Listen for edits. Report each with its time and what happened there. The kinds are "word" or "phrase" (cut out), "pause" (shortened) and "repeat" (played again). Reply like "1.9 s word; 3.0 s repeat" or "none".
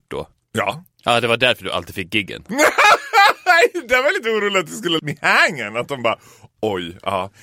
5.0 s word